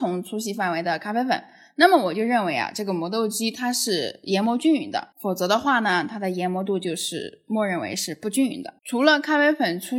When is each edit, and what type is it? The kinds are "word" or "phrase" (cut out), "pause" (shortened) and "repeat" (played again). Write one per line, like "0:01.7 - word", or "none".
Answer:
0:05.1 - pause
0:08.8 - pause